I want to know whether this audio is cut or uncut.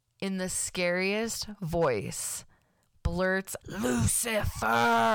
cut